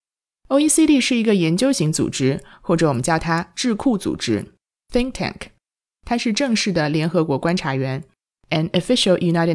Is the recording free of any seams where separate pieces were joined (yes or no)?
yes